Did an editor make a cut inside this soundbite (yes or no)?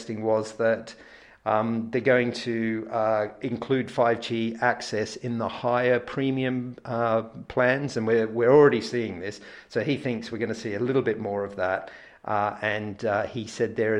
no